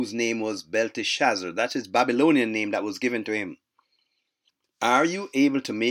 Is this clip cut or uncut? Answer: uncut